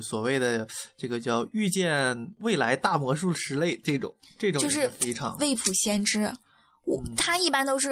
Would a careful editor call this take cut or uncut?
uncut